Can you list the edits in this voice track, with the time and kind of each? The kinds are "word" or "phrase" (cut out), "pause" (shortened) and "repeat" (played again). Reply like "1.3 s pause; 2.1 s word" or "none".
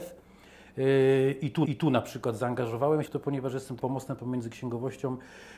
1.6 s repeat; 3.0 s word; 3.8 s word

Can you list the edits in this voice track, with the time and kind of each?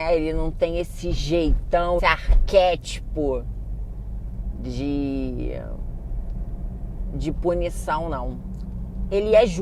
2.0 s word

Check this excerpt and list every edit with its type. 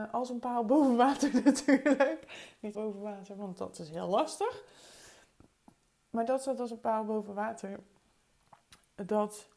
2.7 s phrase

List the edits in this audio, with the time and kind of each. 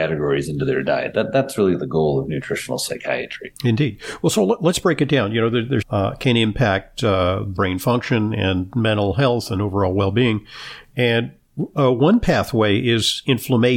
3.6 s pause; 5.8 s phrase; 7.6 s word

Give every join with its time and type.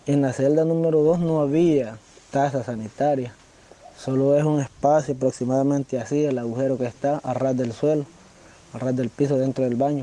none

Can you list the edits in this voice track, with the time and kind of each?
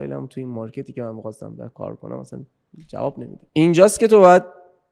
3.5 s pause

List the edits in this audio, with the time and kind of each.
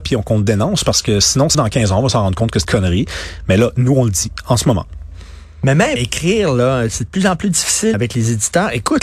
1.5 s word; 2.6 s word; 6.0 s word; 7.9 s word

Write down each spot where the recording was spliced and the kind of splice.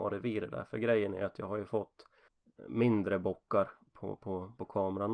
2.3 s pause

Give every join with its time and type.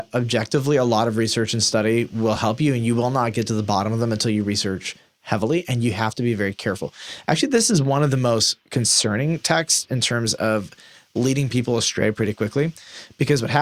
none

